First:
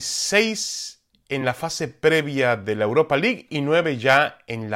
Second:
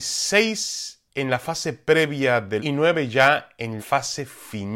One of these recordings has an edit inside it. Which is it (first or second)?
second